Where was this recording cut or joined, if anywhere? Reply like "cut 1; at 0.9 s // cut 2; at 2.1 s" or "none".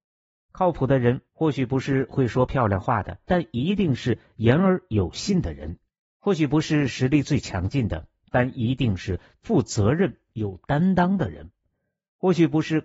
cut 1; at 1.3 s // cut 2; at 3.2 s // cut 3; at 5.9 s